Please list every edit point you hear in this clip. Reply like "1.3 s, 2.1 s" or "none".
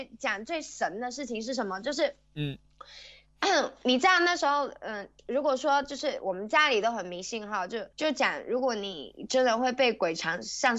5.2 s, 7.9 s